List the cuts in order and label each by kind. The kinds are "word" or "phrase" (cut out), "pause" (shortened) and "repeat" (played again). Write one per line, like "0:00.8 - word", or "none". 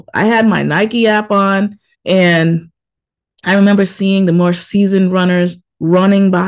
0:01.9 - pause